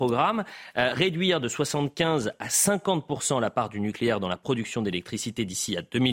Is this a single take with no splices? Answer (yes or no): yes